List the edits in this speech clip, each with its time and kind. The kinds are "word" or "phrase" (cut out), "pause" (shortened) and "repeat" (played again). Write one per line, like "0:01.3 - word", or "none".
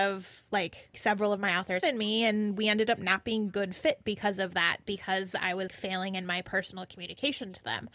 0:00.9 - word
0:01.8 - word
0:05.7 - word